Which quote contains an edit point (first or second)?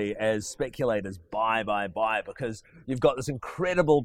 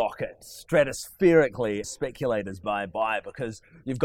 second